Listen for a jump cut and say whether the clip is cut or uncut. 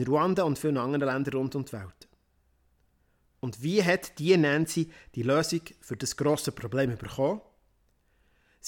uncut